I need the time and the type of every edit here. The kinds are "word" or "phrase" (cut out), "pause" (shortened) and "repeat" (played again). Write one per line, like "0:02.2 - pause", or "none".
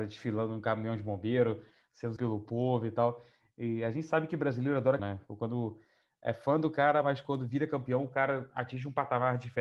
0:02.2 - word
0:05.0 - word